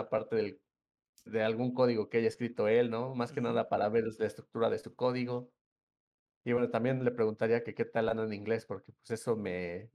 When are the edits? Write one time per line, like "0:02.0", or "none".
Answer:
0:01.3